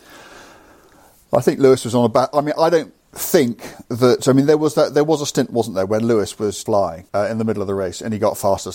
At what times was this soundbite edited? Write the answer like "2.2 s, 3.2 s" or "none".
3.0 s, 6.7 s, 7.1 s